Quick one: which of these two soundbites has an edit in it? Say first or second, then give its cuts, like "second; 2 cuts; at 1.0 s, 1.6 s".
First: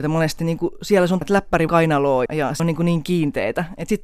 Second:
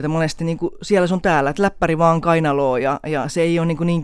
first; 4 cuts; at 1.2 s, 1.7 s, 2.3 s, 2.6 s